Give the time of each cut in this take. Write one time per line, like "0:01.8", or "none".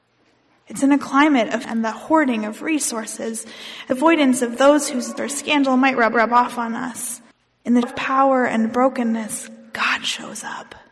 0:01.6
0:03.9
0:05.2
0:06.1
0:07.3
0:07.8